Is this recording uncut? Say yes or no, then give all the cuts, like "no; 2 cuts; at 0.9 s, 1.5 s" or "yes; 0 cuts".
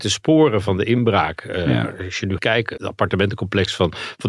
no; 2 cuts; at 2.4 s, 2.8 s